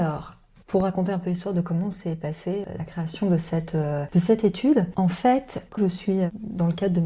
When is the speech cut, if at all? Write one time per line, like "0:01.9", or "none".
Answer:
0:05.8